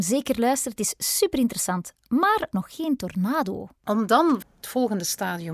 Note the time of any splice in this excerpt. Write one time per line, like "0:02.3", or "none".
0:02.5
0:03.8
0:04.4